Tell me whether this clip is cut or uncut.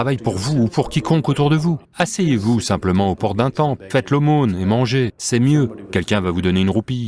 cut